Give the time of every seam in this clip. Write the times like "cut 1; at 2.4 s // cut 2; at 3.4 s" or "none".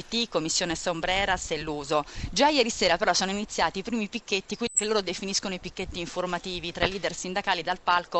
none